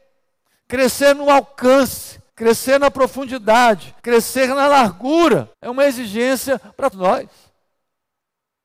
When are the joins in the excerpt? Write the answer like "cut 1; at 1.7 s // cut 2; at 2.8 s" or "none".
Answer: cut 1; at 2.3 s // cut 2; at 4.0 s // cut 3; at 5.5 s // cut 4; at 6.9 s